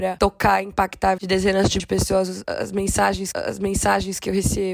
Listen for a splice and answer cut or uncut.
cut